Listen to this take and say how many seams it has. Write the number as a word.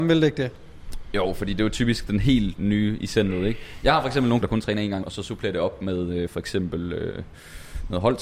two